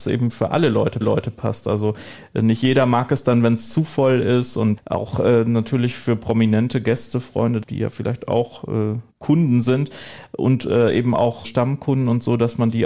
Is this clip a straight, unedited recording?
no; 5 cuts; at 1.0 s, 4.8 s, 7.6 s, 9.1 s, 11.4 s

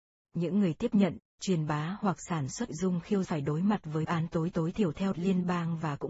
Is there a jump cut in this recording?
yes; 5 cuts; at 2.7 s, 3.2 s, 4.0 s, 4.5 s, 5.1 s

